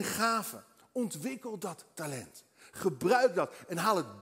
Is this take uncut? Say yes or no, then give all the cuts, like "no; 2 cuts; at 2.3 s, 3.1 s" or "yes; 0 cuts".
yes; 0 cuts